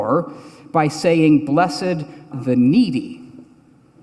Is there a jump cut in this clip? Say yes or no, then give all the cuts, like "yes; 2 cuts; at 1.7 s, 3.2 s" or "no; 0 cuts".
yes; 1 cut; at 2.3 s